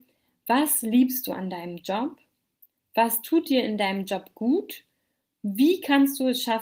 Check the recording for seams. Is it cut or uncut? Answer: uncut